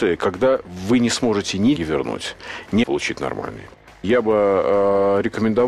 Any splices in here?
yes; 2 cuts; at 1.8 s, 2.8 s

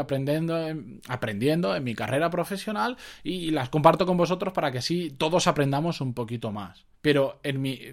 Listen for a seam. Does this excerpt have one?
yes; 1 cut; at 6.9 s

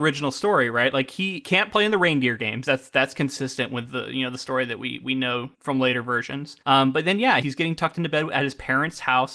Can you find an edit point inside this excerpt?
yes; 3 cuts; at 5.5 s, 6.6 s, 7.4 s

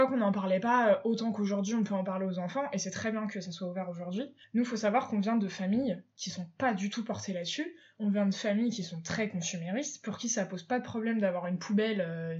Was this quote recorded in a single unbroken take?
yes; 0 cuts

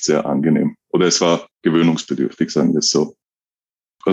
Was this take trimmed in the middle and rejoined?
yes; 1 cut; at 1.5 s

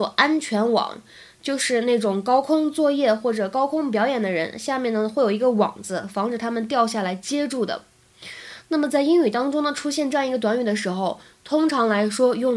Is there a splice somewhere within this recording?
no; 0 cuts

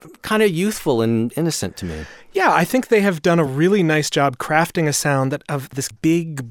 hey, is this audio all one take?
yes; 0 cuts

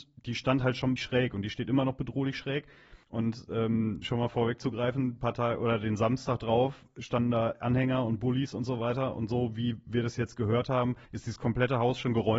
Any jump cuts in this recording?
yes; 4 cuts; at 1.0 s, 3.0 s, 4.0 s, 11.0 s

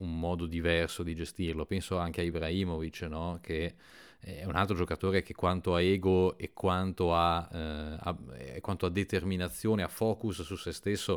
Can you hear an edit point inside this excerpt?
no; 0 cuts

